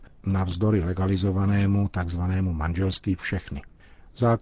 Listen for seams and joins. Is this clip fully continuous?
no; 1 cut; at 3.2 s

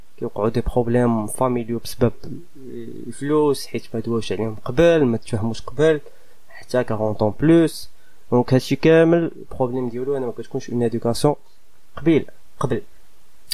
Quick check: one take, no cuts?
yes; 0 cuts

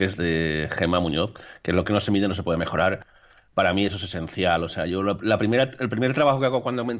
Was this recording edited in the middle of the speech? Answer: yes; 1 cut; at 1.8 s

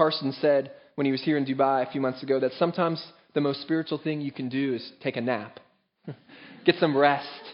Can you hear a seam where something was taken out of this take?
no; 0 cuts

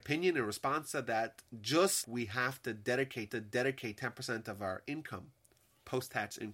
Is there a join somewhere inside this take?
yes; 2 cuts; at 2.0 s, 3.3 s

